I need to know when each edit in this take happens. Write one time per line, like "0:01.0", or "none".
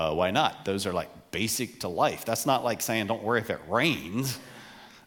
none